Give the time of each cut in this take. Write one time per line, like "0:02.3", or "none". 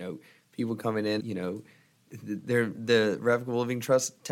0:01.2